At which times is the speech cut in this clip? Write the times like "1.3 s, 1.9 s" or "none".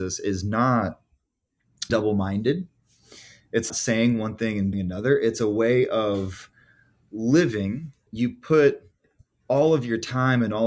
1.9 s, 3.7 s, 4.7 s, 5.3 s, 8.1 s